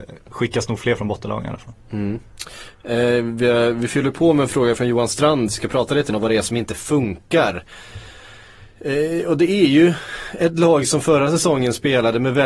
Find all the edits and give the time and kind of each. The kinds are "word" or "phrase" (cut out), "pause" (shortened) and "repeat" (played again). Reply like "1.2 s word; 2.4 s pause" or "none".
5.5 s phrase; 6.1 s word; 8.7 s pause